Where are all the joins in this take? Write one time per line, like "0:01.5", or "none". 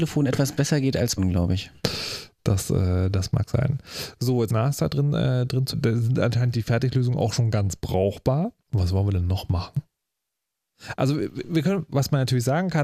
0:01.2
0:04.5
0:05.7
0:08.6